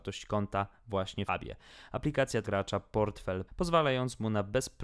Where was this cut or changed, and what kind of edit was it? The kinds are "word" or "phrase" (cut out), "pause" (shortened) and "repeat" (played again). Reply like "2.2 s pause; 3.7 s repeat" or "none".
1.3 s phrase; 2.4 s phrase; 3.5 s word

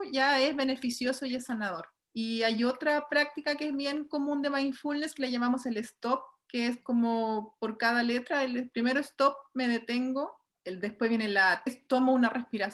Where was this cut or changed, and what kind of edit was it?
11.7 s phrase

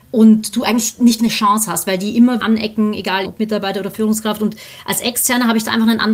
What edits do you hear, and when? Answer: 1.2 s word; 2.4 s phrase; 3.2 s word

